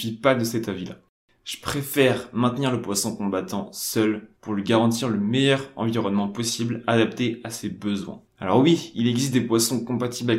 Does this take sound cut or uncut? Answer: uncut